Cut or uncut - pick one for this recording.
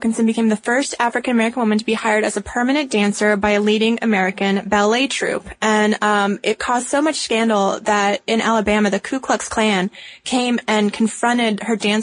uncut